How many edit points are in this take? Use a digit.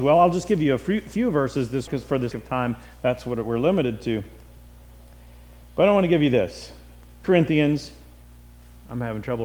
3